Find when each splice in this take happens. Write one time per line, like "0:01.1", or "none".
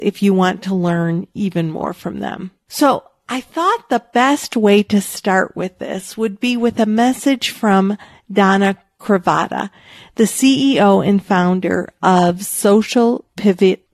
none